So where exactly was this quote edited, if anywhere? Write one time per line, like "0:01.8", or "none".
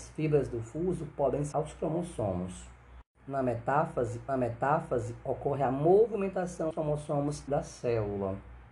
0:01.5
0:04.3
0:06.7
0:07.5